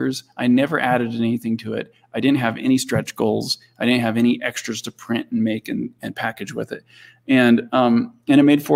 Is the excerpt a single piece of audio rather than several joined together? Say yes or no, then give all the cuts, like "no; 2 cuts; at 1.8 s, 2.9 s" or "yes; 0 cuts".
yes; 0 cuts